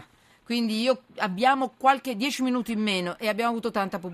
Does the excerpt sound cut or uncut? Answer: uncut